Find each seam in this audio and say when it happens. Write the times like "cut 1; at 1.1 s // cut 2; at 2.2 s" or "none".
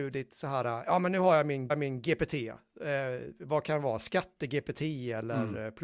cut 1; at 1.7 s